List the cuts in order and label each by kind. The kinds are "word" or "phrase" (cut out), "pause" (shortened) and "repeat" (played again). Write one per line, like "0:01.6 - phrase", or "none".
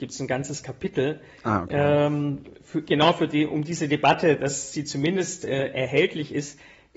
none